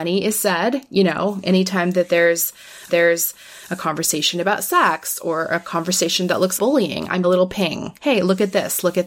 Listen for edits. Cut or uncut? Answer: cut